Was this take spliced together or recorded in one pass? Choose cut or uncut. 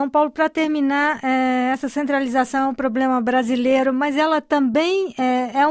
uncut